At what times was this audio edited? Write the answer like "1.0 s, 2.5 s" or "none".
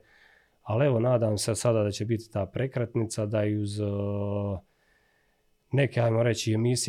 none